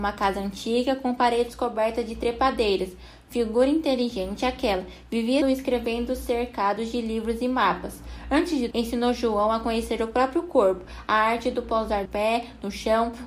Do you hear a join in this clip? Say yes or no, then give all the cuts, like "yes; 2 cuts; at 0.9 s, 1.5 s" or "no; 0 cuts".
yes; 3 cuts; at 5.4 s, 8.7 s, 12.1 s